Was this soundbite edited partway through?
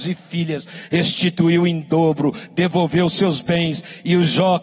no; 0 cuts

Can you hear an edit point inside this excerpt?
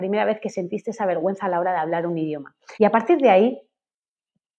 yes; 1 cut; at 2.7 s

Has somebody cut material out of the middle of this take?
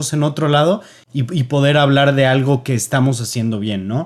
no; 0 cuts

